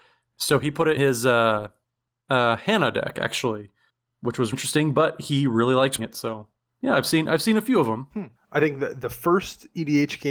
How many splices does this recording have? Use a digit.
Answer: 4